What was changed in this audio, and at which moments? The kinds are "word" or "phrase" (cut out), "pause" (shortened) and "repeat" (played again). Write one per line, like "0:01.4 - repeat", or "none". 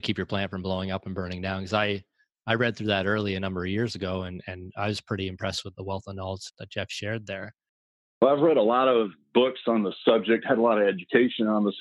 0:05.7 - word
0:06.5 - word

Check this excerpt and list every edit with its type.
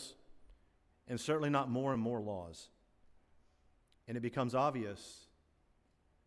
0:01.9 - word

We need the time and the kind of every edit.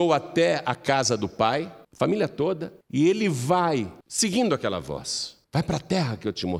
0:01.8 - pause
0:02.8 - pause
0:04.0 - pause
0:05.4 - pause

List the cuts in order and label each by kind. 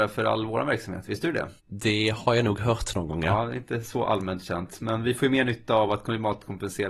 0:01.6 - pause

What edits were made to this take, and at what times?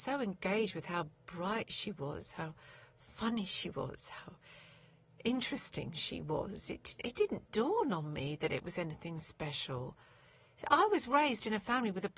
none

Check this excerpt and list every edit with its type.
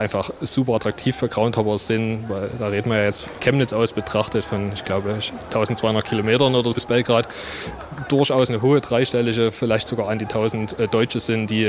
0:03.4 - word
0:06.7 - word

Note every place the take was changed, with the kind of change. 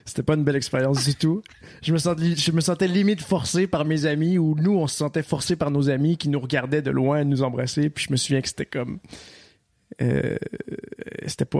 none

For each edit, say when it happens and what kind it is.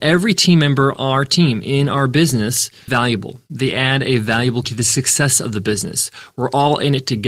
0:01.0 - word
0:02.9 - word
0:04.6 - word

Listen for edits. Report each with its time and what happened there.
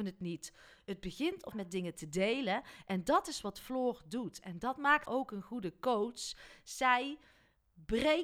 0:01.5 - word
0:05.0 - word

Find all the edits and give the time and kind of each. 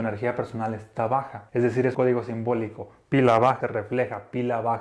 0:01.5 - pause
0:01.9 - word
0:03.6 - phrase

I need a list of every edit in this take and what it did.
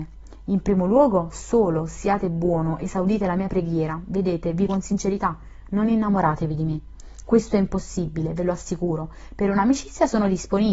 0:04.7 - word

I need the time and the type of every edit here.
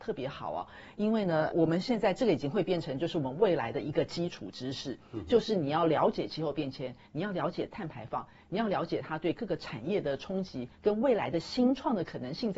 0:01.5 - word

